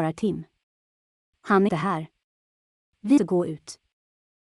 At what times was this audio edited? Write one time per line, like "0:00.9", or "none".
0:01.7
0:03.2